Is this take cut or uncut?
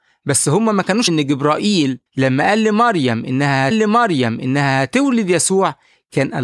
cut